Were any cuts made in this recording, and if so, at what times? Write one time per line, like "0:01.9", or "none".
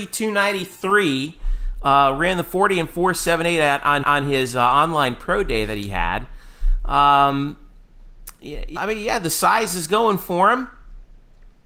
0:04.0
0:08.8